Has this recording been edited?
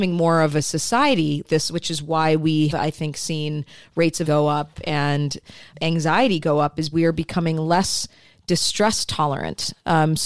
yes; 5 cuts; at 1.4 s, 2.7 s, 4.3 s, 5.7 s, 6.9 s

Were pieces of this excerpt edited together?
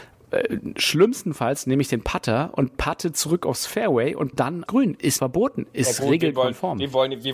yes; 3 cuts; at 4.3 s, 4.7 s, 5.2 s

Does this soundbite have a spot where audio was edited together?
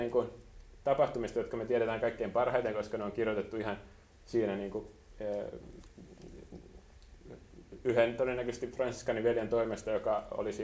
no; 0 cuts

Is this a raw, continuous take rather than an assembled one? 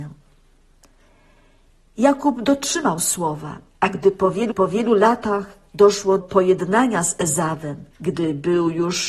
no; 4 cuts; at 3.7 s, 4.5 s, 6.2 s, 7.9 s

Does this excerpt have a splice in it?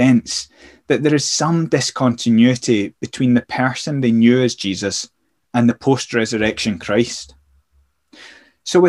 no; 0 cuts

